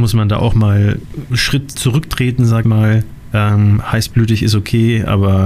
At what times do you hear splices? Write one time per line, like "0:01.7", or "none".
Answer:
0:01.3
0:01.7
0:02.6